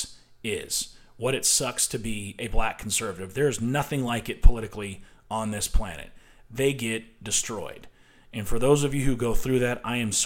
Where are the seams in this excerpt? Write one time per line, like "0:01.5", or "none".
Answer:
none